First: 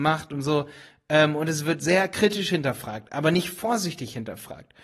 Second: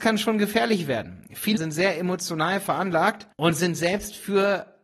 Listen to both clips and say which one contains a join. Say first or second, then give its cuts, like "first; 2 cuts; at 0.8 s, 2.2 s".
second; 2 cuts; at 1.6 s, 3.3 s